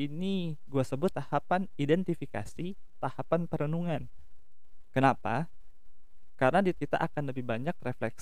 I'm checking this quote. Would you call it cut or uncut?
cut